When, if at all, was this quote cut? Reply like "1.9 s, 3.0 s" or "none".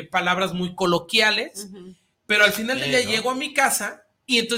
2.1 s